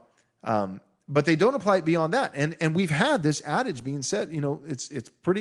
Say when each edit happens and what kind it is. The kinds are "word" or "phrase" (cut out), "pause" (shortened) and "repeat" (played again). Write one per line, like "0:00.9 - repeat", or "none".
none